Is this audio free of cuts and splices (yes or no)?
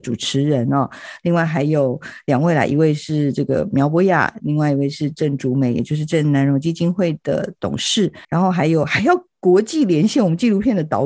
no